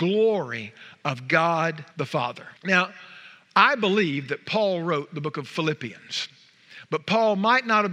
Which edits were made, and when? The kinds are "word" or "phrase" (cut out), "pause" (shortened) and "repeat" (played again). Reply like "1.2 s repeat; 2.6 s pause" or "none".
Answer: 1.9 s pause; 2.6 s pause